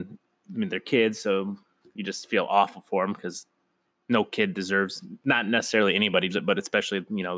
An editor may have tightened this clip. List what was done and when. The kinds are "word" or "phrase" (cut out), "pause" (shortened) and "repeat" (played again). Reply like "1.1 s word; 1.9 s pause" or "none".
6.3 s word